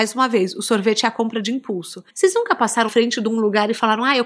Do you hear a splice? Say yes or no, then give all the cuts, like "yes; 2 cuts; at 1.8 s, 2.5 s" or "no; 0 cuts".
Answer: yes; 2 cuts; at 2.1 s, 2.9 s